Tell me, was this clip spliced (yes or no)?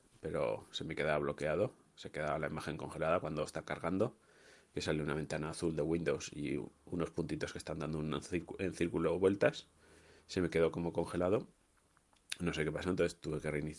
no